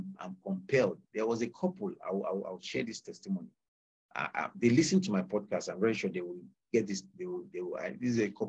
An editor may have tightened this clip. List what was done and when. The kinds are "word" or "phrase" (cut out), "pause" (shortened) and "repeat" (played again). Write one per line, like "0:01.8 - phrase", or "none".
none